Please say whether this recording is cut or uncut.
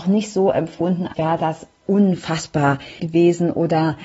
cut